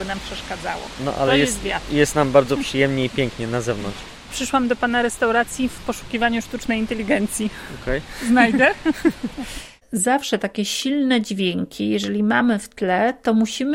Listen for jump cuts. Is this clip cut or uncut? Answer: uncut